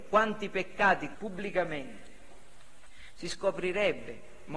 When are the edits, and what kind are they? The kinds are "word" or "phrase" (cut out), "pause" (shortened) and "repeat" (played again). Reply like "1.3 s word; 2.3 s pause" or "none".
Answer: 1.1 s word

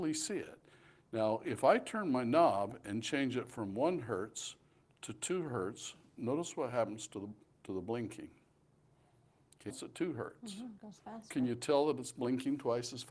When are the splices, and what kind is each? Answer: 9.7 s word

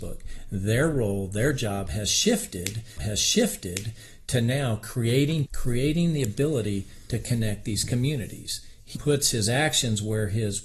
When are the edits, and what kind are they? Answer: 3.0 s repeat; 5.5 s word; 9.0 s word

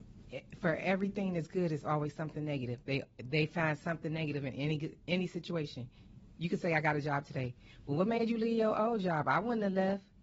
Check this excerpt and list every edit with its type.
none

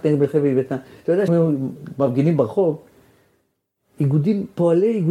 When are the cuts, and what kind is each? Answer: 1.3 s word

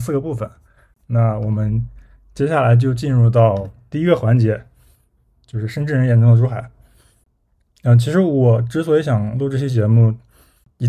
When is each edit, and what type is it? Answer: none

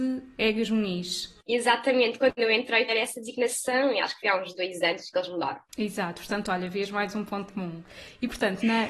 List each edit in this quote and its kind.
2.9 s word; 7.5 s word

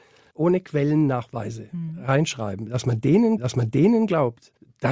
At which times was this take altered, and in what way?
3.4 s repeat

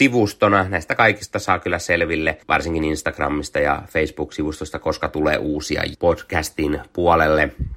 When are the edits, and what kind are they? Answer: 2.4 s pause; 5.9 s word

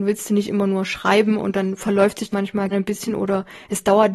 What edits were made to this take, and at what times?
2.3 s word; 2.7 s word

